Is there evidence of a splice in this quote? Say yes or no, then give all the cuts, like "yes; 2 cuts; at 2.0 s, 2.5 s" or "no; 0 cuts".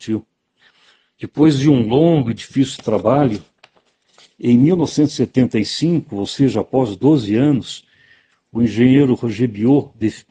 no; 0 cuts